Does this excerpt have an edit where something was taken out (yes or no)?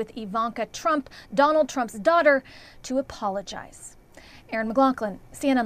no